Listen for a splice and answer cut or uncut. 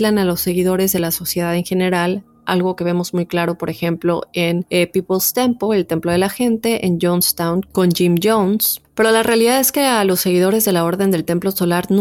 uncut